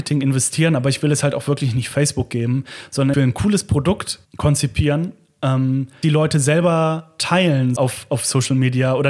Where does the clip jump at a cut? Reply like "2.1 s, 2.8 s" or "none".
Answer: 3.1 s, 4.2 s, 6.0 s, 7.8 s

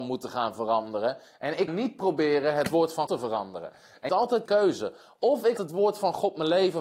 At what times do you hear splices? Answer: 1.7 s, 3.1 s, 4.1 s, 4.5 s, 5.6 s

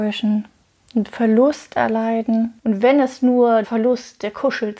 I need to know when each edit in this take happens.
2.6 s, 3.6 s

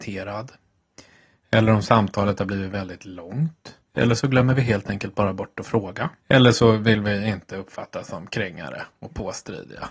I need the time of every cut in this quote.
3.9 s, 6.2 s

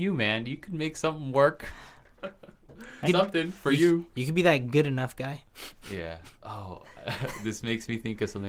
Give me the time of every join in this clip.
3.1 s

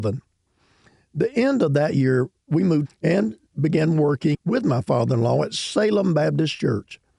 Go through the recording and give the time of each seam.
2.8 s

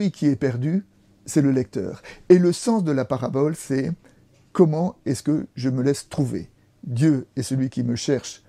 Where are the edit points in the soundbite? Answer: none

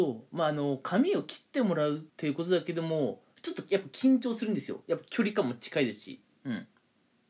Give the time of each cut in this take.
2.1 s

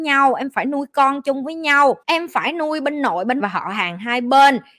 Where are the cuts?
2.0 s, 3.4 s

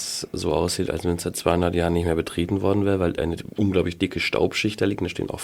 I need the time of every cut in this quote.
none

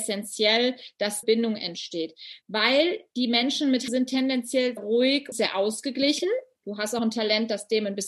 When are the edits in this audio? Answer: 1.2 s, 2.4 s, 3.9 s, 4.8 s, 5.3 s, 7.0 s

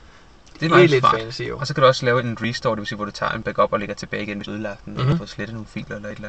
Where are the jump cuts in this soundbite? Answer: 4.5 s

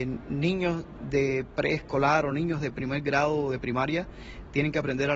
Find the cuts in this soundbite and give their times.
none

